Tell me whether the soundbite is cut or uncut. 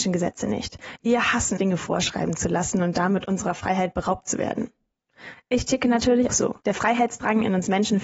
cut